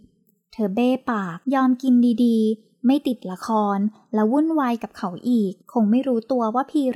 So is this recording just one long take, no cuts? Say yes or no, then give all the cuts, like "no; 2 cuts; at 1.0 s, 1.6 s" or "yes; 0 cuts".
no; 2 cuts; at 1.4 s, 5.6 s